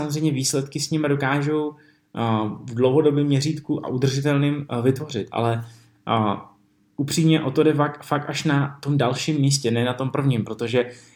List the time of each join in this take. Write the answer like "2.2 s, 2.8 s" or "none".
none